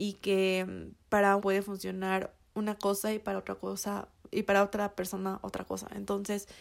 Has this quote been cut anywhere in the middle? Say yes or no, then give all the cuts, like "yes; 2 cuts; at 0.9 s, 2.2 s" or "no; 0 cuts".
yes; 1 cut; at 1.4 s